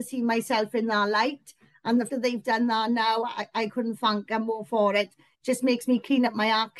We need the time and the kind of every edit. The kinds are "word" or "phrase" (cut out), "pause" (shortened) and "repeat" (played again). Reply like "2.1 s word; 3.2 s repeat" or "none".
2.1 s word